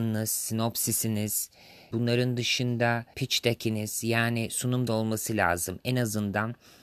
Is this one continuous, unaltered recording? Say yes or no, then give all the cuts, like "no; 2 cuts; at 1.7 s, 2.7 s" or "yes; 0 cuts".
no; 3 cuts; at 1.9 s, 3.1 s, 4.9 s